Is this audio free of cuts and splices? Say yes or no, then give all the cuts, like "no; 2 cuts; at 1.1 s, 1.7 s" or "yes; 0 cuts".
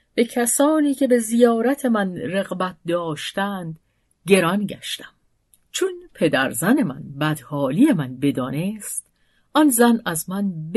yes; 0 cuts